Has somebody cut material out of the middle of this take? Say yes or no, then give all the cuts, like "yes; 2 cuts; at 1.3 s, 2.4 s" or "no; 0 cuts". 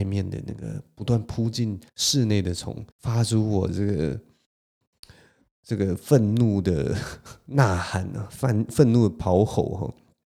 yes; 2 cuts; at 1.9 s, 2.9 s